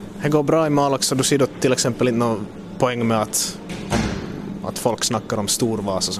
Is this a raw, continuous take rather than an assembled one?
yes; 0 cuts

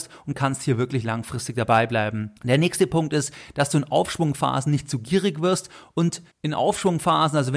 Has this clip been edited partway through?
yes; 2 cuts; at 2.4 s, 6.3 s

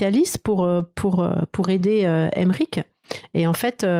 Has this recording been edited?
no; 0 cuts

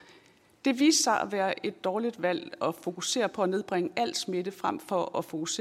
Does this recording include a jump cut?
no; 0 cuts

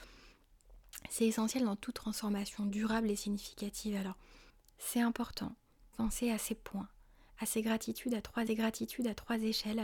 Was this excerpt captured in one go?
no; 3 cuts; at 4.5 s, 5.9 s, 8.5 s

